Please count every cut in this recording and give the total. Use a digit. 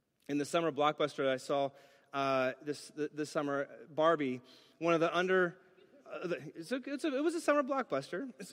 0